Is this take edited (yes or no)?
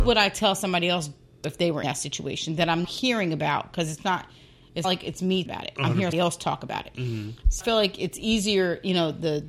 yes